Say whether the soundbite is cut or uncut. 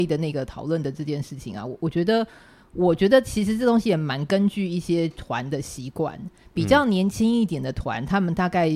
uncut